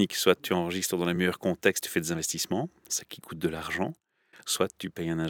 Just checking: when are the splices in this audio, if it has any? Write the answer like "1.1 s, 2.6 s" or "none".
none